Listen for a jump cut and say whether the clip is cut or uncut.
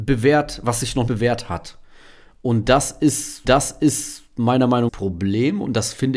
cut